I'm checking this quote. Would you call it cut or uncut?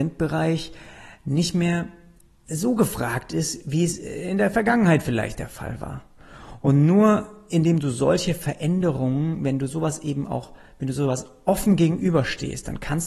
uncut